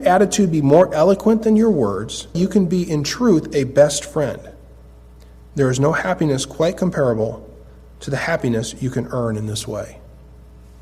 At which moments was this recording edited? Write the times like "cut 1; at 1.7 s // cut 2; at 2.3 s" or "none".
cut 1; at 2.3 s

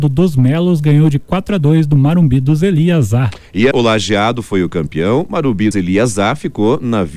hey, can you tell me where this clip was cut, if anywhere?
cut 1; at 3.7 s // cut 2; at 5.7 s

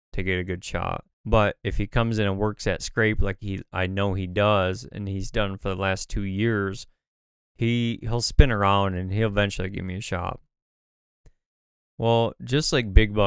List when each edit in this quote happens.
cut 1; at 1.1 s

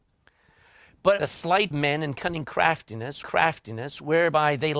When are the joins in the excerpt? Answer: cut 1; at 1.2 s // cut 2; at 1.7 s // cut 3; at 3.2 s

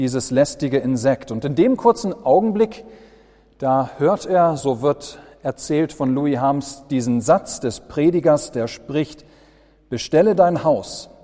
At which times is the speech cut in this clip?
none

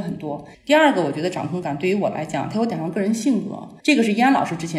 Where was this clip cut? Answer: cut 1; at 3.8 s

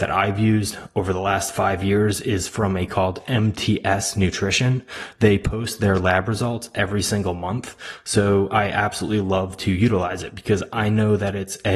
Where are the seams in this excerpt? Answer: cut 1; at 2.9 s

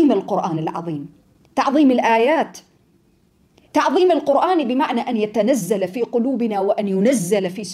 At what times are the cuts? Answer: none

